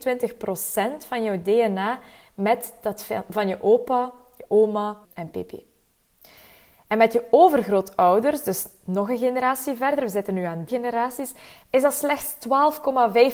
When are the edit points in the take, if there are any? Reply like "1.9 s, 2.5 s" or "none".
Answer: 5.0 s, 10.7 s